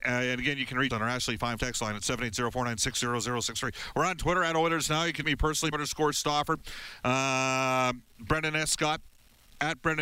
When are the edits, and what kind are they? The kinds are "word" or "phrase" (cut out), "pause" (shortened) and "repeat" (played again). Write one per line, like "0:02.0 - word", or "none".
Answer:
0:00.9 - word
0:01.6 - word
0:05.2 - word
0:05.7 - word